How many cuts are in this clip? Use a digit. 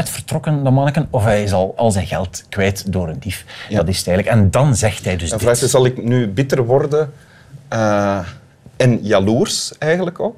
1